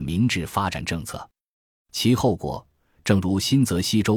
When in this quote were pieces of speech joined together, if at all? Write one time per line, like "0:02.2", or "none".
none